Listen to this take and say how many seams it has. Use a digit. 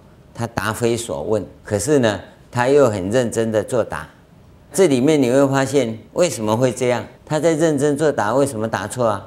4